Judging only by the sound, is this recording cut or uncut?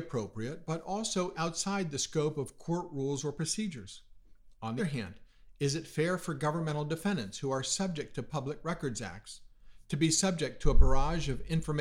cut